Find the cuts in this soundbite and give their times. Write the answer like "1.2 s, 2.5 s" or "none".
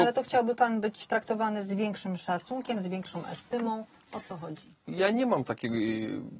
none